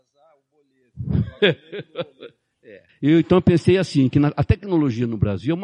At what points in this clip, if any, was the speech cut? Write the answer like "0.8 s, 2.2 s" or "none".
2.9 s